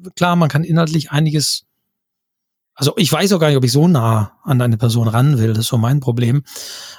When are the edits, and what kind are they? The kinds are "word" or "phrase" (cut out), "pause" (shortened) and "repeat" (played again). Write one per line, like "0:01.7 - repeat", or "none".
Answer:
none

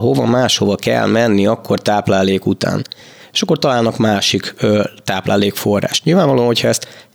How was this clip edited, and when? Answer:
none

